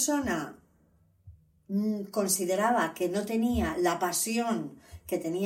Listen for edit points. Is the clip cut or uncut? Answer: uncut